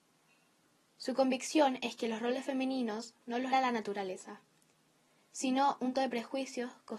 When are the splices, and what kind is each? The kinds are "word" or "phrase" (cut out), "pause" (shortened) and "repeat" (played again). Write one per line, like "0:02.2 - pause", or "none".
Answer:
0:03.5 - word
0:05.9 - word